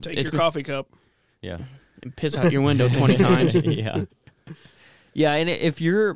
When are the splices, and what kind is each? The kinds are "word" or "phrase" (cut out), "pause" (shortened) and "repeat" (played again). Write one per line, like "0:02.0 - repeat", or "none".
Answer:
none

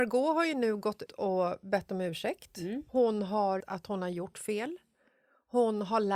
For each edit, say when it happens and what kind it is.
0:01.1 - word
0:02.9 - pause
0:03.6 - word

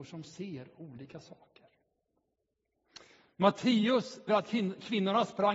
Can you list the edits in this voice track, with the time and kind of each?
0:04.3 - word

